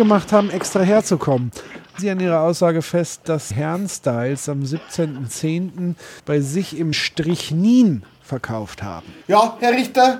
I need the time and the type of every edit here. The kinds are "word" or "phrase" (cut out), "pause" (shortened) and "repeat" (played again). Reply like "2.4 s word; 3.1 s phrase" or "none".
2.0 s word; 3.5 s word; 6.2 s pause; 6.9 s word; 9.2 s pause